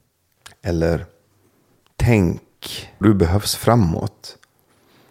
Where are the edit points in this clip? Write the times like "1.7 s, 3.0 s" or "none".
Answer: 3.0 s

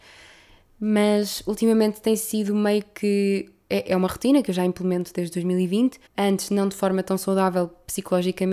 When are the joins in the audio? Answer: 6.1 s

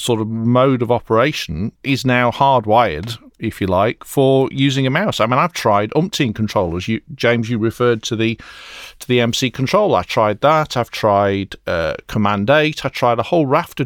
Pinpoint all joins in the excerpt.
1.8 s

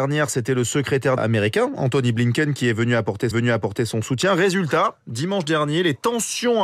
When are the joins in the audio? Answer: 1.2 s, 3.3 s

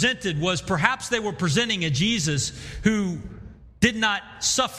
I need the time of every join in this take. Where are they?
none

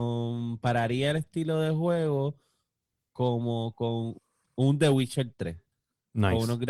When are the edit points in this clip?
none

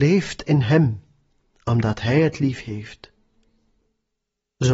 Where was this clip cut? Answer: none

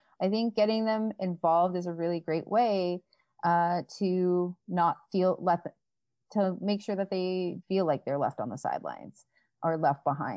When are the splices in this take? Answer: 7.6 s

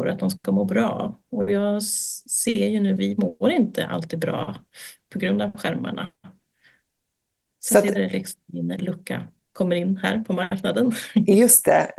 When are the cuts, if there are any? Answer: 3.0 s, 7.9 s

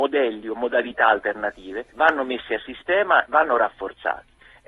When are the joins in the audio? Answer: 1.9 s, 3.3 s

